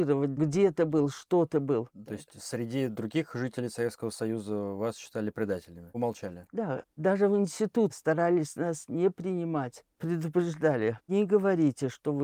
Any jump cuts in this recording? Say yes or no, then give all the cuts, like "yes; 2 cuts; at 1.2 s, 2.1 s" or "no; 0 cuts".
yes; 1 cut; at 5.9 s